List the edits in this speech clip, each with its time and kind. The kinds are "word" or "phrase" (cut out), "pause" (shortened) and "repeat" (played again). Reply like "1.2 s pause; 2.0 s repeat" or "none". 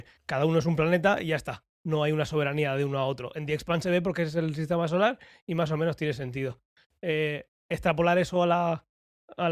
none